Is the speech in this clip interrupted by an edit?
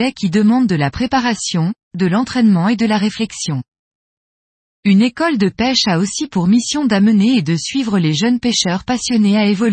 no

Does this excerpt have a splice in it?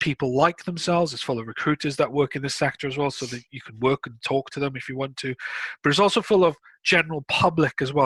no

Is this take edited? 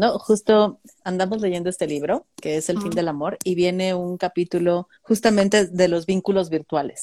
yes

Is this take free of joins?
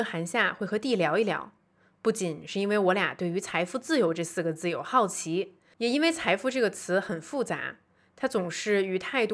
yes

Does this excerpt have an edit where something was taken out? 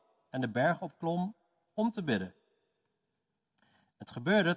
no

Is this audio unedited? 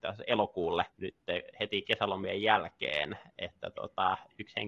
no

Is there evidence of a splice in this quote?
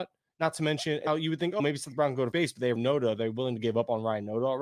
yes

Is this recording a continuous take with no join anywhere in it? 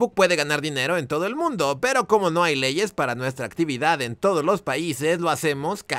yes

